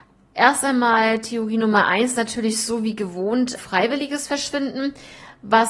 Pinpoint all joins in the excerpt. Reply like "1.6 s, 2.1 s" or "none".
3.6 s